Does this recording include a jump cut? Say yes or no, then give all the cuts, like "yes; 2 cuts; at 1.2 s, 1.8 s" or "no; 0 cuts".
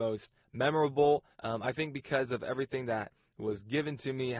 yes; 1 cut; at 1.3 s